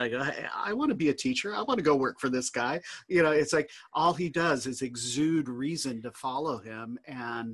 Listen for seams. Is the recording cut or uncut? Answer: uncut